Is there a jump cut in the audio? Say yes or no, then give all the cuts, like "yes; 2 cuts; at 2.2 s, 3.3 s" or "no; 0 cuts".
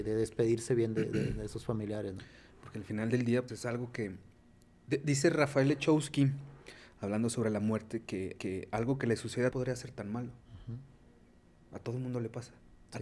yes; 3 cuts; at 3.5 s, 8.4 s, 9.5 s